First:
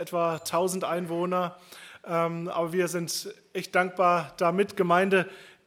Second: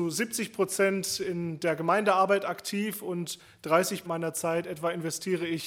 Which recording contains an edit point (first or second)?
second